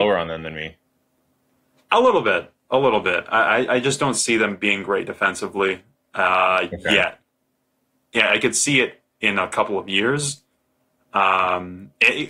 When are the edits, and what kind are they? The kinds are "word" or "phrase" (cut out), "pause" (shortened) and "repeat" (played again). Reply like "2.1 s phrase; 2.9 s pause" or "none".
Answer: none

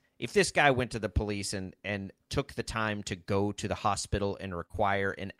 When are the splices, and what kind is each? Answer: none

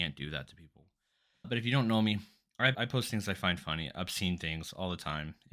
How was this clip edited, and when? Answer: 1.4 s word; 2.7 s word

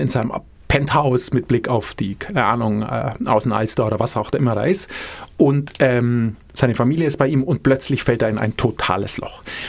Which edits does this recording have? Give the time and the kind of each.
none

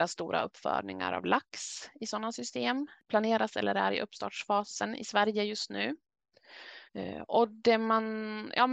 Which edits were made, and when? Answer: 6.9 s pause

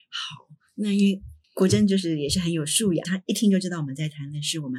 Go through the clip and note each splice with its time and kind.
1.4 s pause; 3.0 s phrase

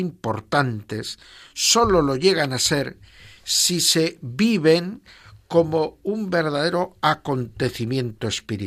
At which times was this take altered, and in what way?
none

